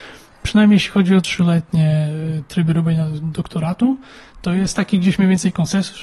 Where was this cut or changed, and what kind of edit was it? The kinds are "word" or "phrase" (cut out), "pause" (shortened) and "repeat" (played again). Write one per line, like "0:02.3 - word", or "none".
none